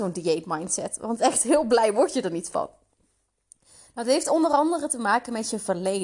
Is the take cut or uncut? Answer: uncut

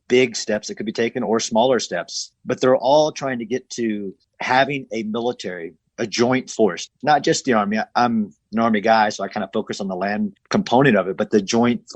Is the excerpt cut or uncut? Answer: uncut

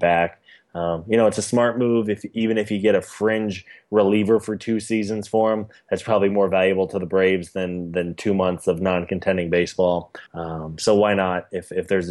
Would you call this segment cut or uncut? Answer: cut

